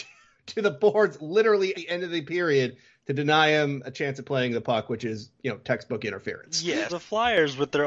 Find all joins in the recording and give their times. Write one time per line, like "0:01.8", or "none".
0:01.7
0:06.9